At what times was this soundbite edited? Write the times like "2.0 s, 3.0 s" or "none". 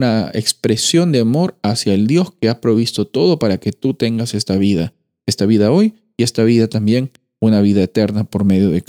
none